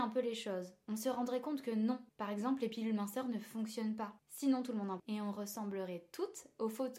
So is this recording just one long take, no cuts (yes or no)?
no